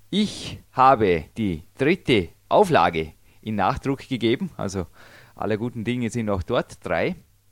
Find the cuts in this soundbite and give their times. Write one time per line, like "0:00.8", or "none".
none